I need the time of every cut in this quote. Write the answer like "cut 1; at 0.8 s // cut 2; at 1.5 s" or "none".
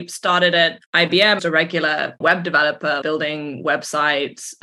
cut 1; at 1.4 s // cut 2; at 2.2 s // cut 3; at 3.0 s